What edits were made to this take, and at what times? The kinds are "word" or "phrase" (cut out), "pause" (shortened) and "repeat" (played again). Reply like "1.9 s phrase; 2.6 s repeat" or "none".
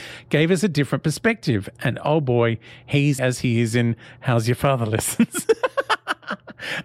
3.2 s phrase